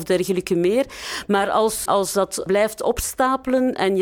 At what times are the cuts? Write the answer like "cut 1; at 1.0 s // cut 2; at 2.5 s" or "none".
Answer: cut 1; at 1.9 s // cut 2; at 2.5 s